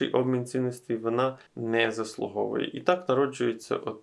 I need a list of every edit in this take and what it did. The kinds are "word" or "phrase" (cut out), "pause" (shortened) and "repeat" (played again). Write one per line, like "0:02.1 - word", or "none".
0:01.5 - pause